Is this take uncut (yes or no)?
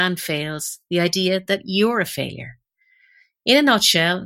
yes